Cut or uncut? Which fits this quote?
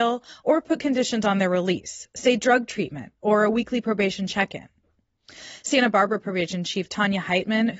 uncut